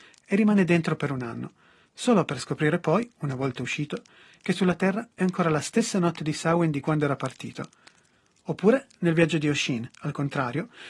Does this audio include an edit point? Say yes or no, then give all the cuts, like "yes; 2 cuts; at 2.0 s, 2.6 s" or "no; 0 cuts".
no; 0 cuts